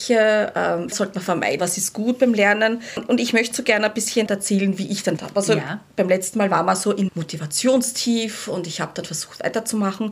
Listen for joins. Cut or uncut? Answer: cut